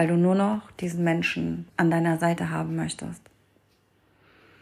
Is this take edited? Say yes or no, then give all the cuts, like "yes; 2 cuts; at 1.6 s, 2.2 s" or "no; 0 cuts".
yes; 1 cut; at 1.7 s